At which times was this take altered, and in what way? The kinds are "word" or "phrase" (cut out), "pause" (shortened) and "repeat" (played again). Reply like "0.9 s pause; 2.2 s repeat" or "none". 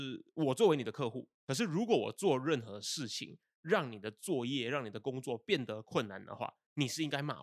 1.4 s pause